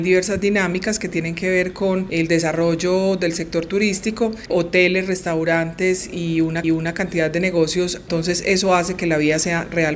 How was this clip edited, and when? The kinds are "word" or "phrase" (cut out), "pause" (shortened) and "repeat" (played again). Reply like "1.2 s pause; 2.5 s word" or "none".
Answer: 6.6 s repeat